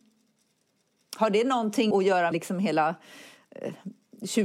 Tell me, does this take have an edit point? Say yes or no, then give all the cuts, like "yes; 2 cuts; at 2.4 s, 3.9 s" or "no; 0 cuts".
yes; 2 cuts; at 1.9 s, 2.3 s